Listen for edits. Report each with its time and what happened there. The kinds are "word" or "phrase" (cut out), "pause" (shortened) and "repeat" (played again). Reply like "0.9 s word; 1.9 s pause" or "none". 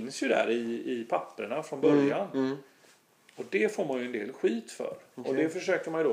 none